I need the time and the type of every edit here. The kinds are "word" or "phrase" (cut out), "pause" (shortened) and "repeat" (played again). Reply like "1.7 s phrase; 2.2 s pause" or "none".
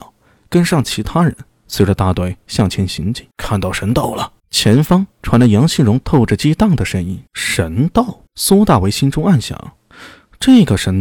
3.3 s pause; 4.4 s pause; 5.1 s pause; 7.3 s pause; 8.3 s pause

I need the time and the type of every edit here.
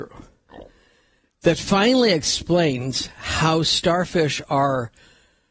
none

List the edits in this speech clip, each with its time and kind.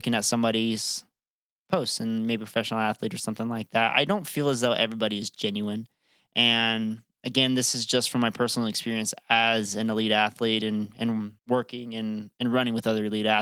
11.4 s pause

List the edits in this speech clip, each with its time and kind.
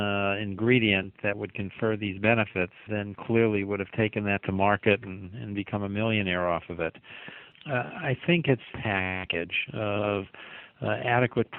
2.9 s word; 8.7 s phrase

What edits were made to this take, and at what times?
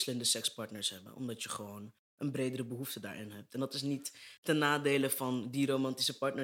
none

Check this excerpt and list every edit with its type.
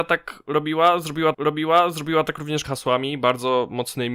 1.3 s repeat; 2.6 s phrase

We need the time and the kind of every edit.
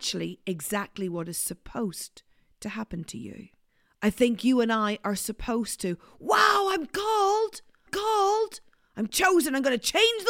3.7 s pause; 7.9 s repeat

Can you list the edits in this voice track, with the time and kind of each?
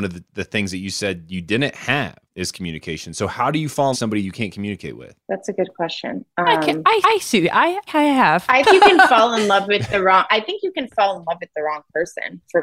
2.3 s pause; 3.9 s phrase; 5.2 s pause; 7.0 s repeat; 7.9 s word; 8.7 s word

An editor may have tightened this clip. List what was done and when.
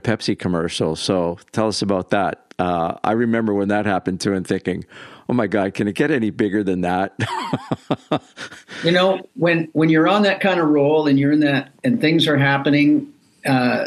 2.5 s pause

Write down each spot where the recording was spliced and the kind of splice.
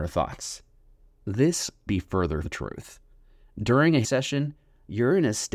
1.9 s word; 2.4 s word; 4.0 s word

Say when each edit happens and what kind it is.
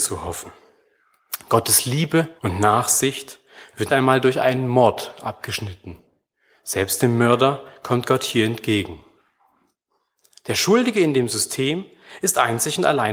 2.4 s pause; 3.9 s word

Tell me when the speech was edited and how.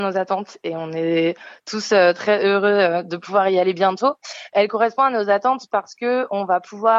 none

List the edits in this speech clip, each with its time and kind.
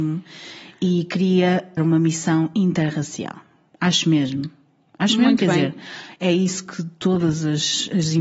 1.8 s word

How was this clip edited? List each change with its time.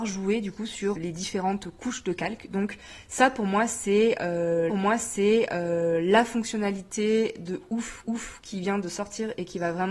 1.0 s word; 4.7 s repeat; 8.0 s repeat

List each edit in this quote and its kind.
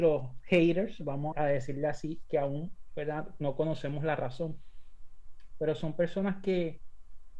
1.3 s word

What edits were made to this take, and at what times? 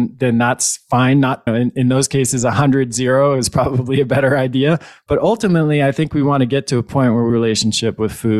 1.5 s word; 7.3 s phrase

